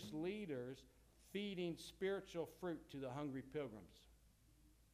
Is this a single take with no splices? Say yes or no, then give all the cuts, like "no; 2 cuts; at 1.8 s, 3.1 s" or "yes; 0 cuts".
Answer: yes; 0 cuts